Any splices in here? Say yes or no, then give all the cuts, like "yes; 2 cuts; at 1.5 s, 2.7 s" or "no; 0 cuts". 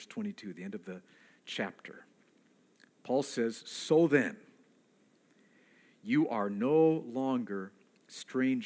no; 0 cuts